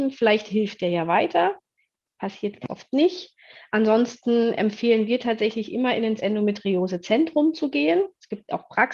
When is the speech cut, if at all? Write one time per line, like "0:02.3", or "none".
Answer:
0:02.7
0:06.2